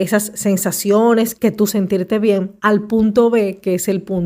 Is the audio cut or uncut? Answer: cut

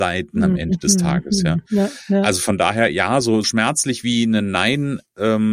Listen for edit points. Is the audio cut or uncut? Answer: cut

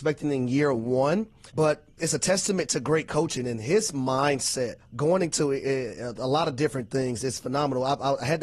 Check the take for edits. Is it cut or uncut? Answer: cut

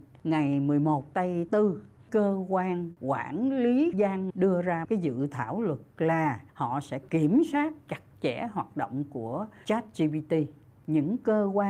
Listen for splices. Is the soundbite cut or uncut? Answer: cut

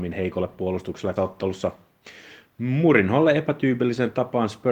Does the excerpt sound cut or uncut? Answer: cut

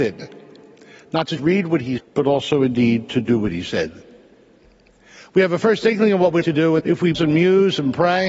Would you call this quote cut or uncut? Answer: cut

